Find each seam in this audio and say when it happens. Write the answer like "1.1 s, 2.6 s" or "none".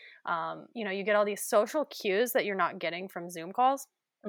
none